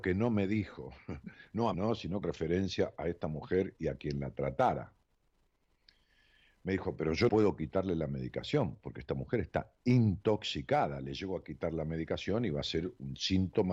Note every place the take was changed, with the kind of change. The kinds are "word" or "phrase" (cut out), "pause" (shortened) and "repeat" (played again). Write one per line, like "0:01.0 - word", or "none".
0:01.7 - word
0:02.2 - word
0:07.3 - word

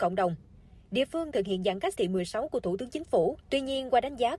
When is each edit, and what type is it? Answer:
0:01.3 - word
0:02.0 - phrase
0:03.4 - pause

